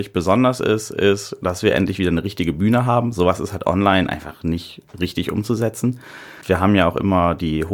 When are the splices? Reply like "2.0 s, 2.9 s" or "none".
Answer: none